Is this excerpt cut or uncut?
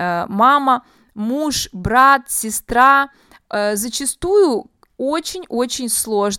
uncut